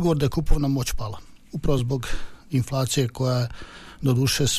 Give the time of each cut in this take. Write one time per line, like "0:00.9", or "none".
none